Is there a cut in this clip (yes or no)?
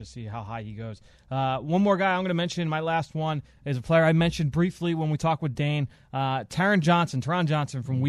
no